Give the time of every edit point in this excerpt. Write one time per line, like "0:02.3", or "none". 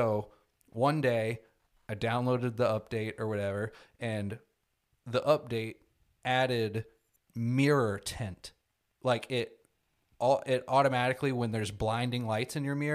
0:07.2